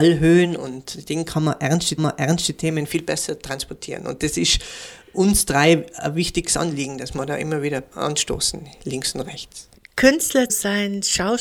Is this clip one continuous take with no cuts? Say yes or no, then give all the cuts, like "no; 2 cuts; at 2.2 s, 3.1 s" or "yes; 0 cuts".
no; 3 cuts; at 2.0 s, 7.9 s, 10.5 s